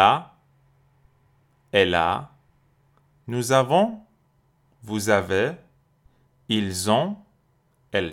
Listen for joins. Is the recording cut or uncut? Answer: uncut